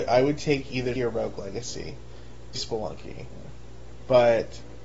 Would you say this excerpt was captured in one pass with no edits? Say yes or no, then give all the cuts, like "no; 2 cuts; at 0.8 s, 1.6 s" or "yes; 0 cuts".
no; 2 cuts; at 1.0 s, 2.5 s